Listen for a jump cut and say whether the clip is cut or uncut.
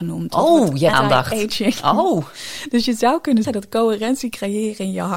cut